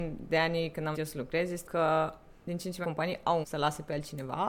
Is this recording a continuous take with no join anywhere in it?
no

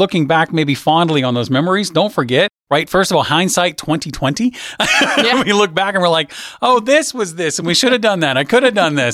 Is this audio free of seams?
yes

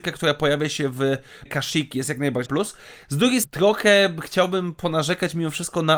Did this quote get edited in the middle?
yes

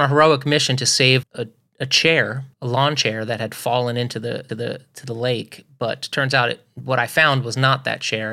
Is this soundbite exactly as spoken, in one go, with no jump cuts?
no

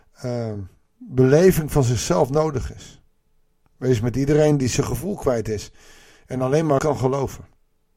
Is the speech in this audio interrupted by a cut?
yes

